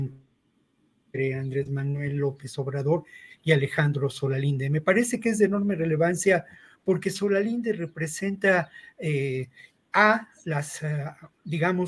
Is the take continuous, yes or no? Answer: yes